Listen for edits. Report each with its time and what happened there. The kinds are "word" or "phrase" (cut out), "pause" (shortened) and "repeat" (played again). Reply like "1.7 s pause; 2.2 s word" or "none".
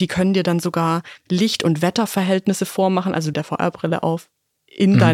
3.3 s phrase